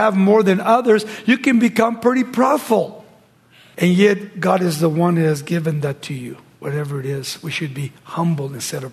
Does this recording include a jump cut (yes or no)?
no